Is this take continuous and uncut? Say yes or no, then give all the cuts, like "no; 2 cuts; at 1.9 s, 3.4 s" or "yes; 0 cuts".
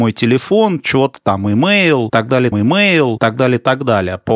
no; 1 cut; at 2.5 s